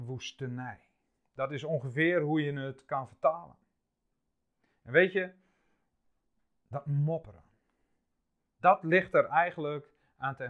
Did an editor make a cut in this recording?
no; 0 cuts

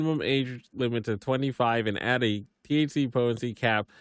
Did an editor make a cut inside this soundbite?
no; 0 cuts

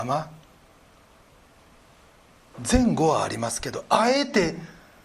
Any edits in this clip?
no; 0 cuts

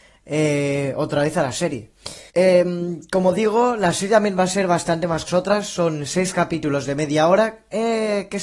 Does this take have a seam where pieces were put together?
yes; 2 cuts; at 2.3 s, 5.3 s

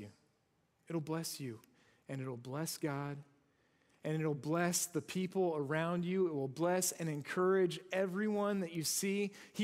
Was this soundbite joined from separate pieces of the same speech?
no; 0 cuts

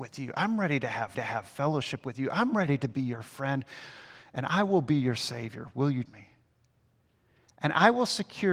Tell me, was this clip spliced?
yes; 2 cuts; at 1.1 s, 6.1 s

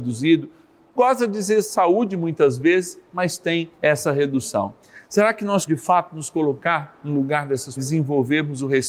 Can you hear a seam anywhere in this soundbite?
yes; 3 cuts; at 3.7 s, 5.7 s, 7.8 s

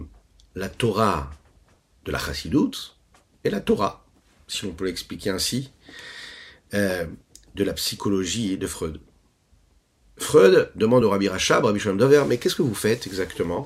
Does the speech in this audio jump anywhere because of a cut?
no; 0 cuts

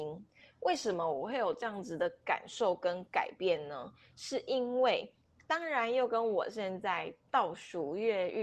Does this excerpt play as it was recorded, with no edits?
yes; 0 cuts

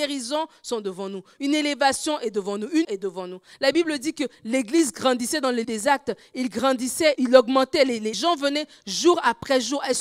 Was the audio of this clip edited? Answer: yes; 4 cuts; at 2.8 s, 5.6 s, 7.1 s, 8.1 s

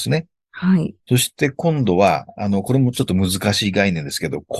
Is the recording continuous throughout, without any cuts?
no; 1 cut; at 1.0 s

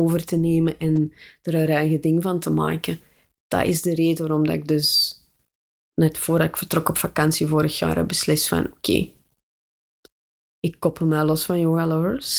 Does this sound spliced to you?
no; 0 cuts

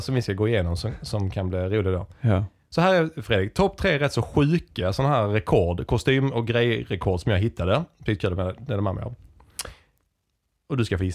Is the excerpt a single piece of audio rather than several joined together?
yes; 0 cuts

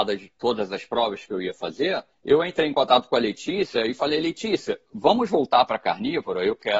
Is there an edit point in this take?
yes; 1 cut; at 2.1 s

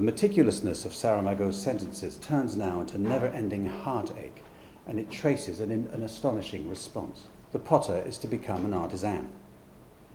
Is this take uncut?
no; 1 cut; at 7.4 s

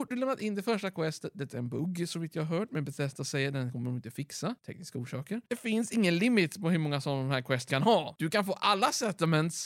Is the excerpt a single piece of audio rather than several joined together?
no; 1 cut; at 7.7 s

